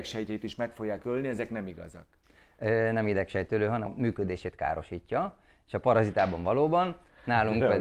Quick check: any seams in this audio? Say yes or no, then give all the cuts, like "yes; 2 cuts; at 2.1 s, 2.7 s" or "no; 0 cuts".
yes; 1 cut; at 3.9 s